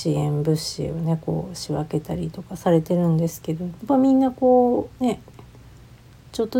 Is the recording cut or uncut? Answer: cut